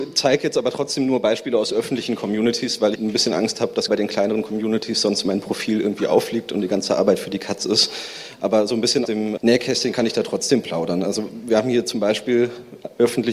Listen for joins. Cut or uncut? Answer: cut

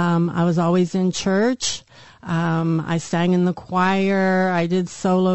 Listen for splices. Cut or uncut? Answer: uncut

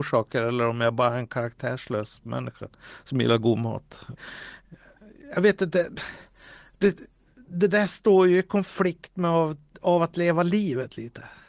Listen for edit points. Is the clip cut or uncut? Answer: uncut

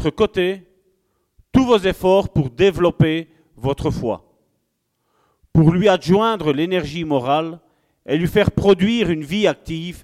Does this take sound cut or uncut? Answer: uncut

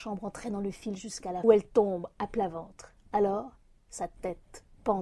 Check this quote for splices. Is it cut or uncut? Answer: cut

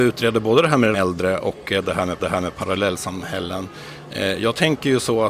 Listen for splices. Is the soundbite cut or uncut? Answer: cut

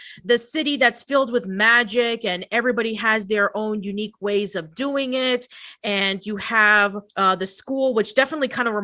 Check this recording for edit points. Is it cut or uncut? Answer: cut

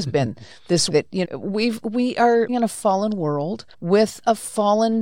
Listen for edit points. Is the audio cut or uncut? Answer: cut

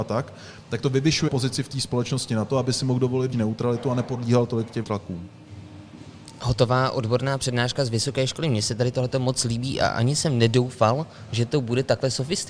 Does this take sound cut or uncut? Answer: cut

